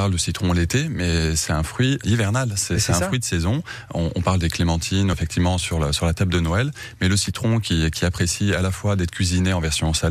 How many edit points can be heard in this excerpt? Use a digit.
2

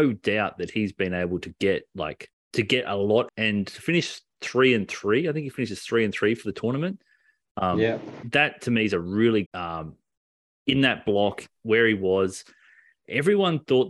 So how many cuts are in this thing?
3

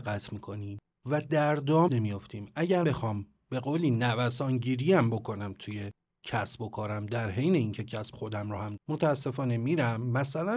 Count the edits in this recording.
4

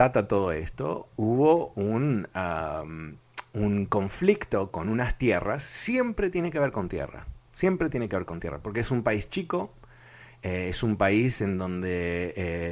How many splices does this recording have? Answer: 0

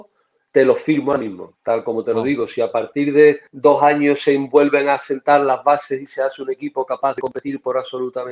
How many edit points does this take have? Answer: 1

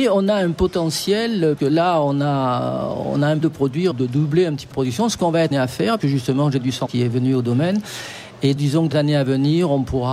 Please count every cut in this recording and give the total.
9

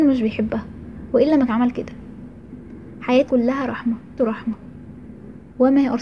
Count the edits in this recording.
3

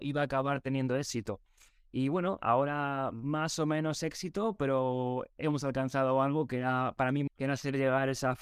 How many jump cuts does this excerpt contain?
1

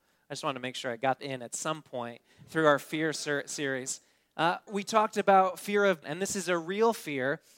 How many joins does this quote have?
3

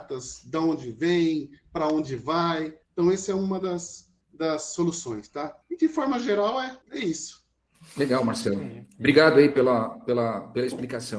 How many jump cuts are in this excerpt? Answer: 4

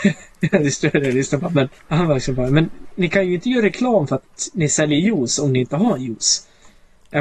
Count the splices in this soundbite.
2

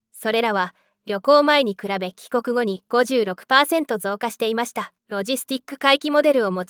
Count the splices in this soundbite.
1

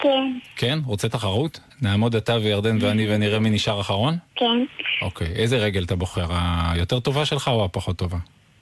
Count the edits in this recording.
2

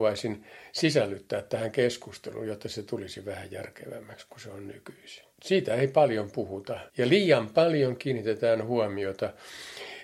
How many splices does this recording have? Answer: 2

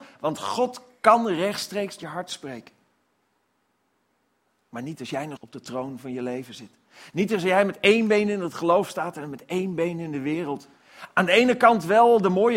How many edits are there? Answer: 2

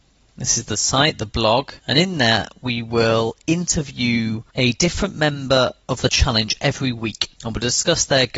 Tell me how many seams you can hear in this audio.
4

